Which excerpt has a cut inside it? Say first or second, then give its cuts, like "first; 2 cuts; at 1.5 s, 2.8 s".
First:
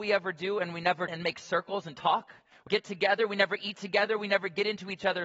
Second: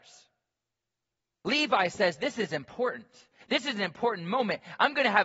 first; 2 cuts; at 1.1 s, 2.7 s